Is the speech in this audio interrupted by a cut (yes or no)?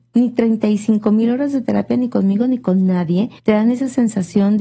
yes